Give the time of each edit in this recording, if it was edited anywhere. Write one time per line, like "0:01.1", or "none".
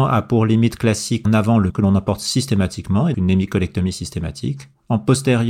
0:01.2
0:01.7
0:03.1